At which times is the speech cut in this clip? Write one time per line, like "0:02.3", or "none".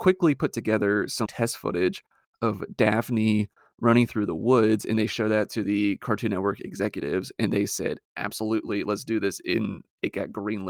0:01.3